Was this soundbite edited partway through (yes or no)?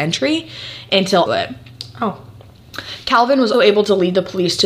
yes